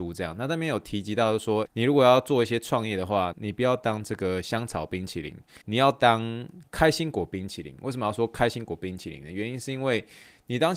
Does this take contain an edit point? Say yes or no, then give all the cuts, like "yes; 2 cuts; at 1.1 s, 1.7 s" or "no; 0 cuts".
yes; 3 cuts; at 1.7 s, 3.3 s, 5.6 s